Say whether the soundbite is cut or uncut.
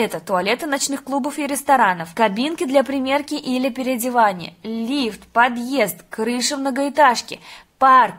uncut